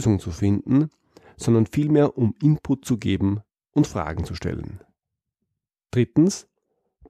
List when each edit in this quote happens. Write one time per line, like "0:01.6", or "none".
none